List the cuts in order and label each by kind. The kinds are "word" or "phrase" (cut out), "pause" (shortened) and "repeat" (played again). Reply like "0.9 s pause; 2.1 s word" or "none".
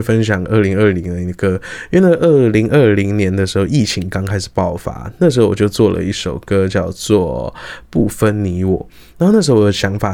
none